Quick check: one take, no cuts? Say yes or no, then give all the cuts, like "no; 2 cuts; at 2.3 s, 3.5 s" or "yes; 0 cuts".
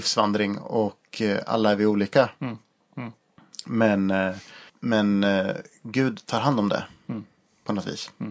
no; 1 cut; at 4.7 s